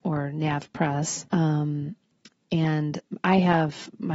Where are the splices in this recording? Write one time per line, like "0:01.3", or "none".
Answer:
0:01.3